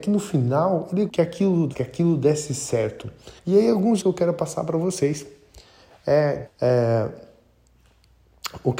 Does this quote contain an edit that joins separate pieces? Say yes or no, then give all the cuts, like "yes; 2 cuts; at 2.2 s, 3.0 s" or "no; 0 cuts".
yes; 5 cuts; at 1.1 s, 1.7 s, 3.4 s, 4.0 s, 6.5 s